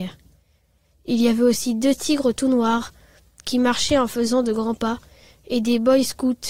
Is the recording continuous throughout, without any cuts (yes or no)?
yes